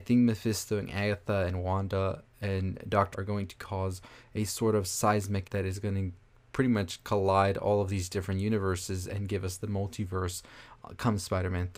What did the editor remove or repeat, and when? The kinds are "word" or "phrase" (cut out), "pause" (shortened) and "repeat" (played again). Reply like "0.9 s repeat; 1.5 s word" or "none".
3.1 s word; 5.4 s word